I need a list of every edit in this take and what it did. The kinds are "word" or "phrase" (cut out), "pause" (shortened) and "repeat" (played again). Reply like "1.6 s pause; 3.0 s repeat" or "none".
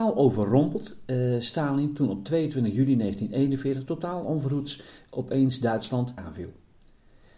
6.2 s phrase